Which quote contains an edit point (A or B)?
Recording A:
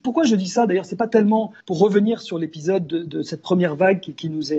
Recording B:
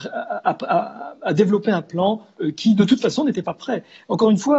A